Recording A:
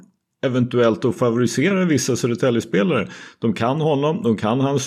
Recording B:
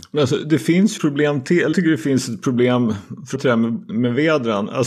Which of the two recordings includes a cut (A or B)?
B